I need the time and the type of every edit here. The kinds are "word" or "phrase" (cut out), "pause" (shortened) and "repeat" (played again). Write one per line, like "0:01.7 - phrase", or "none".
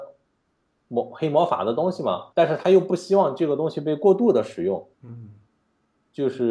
0:02.3 - pause
0:04.9 - pause